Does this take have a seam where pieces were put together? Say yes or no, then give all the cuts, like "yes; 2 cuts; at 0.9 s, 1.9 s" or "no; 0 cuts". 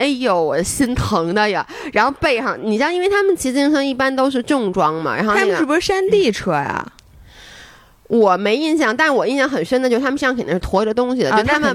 no; 0 cuts